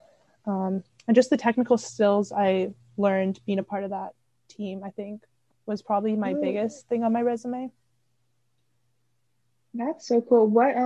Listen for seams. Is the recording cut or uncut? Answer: uncut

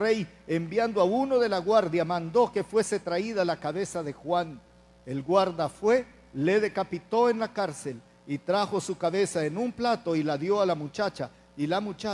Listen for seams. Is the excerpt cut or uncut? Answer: uncut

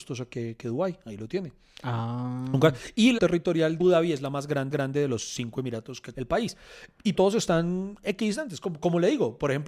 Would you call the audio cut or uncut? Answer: cut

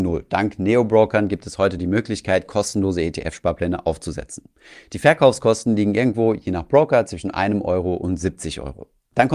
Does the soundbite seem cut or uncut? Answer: uncut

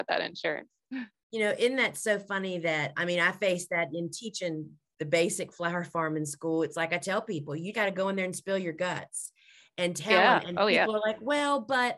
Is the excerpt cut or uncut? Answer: cut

